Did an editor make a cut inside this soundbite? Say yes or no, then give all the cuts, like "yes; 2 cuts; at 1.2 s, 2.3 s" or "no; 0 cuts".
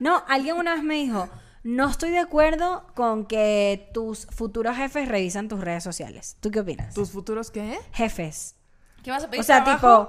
no; 0 cuts